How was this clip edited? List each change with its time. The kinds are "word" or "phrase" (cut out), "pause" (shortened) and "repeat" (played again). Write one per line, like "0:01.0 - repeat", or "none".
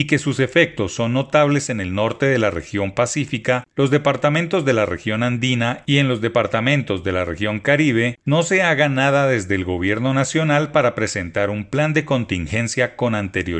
none